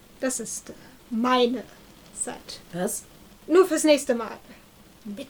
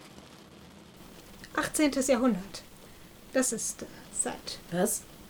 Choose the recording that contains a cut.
second; 1 cut; at 4.0 s

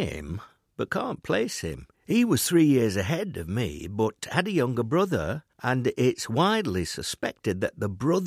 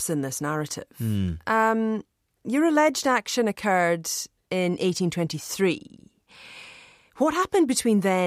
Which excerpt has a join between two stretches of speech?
first; 2 cuts; at 1.9 s, 5.5 s

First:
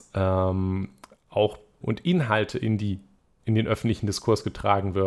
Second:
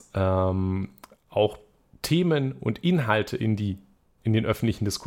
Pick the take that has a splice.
first; 1 cut; at 1.8 s

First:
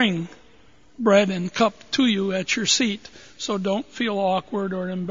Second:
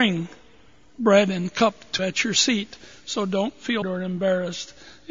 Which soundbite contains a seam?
second; 2 cuts; at 2.0 s, 3.8 s

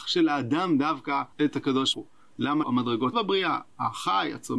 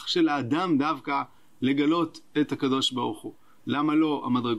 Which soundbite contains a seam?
first; 4 cuts; at 1.3 s, 1.9 s, 2.6 s, 3.1 s

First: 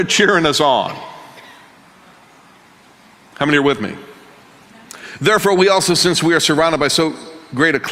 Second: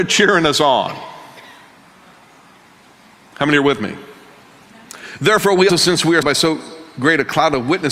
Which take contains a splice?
second; 2 cuts; at 5.7 s, 6.2 s

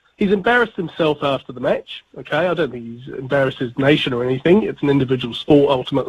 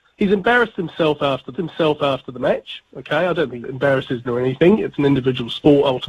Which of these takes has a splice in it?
second; 3 cuts; at 1.5 s, 3.6 s, 4.2 s

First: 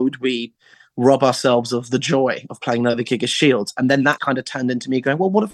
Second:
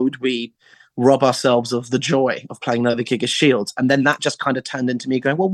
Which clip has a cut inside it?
first; 1 cut; at 4.2 s

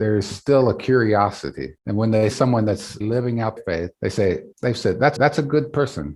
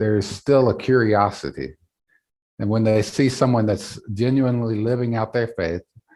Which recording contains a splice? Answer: first; 7 cuts; at 1.8 s, 2.3 s, 3.0 s, 3.6 s, 3.9 s, 4.5 s, 5.2 s

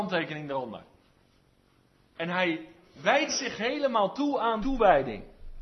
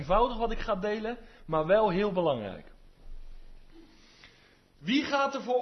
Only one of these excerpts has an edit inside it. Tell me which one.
first; 1 cut; at 4.6 s

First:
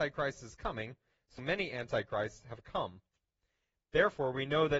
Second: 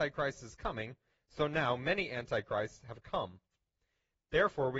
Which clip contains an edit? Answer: first; 1 cut; at 1.4 s

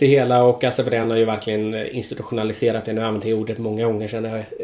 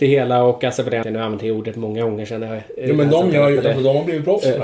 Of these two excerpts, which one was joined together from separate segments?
second; 1 cut; at 1.0 s

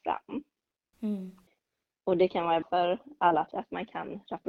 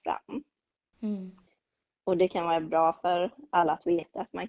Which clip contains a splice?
first; 2 cuts; at 2.6 s, 3.5 s

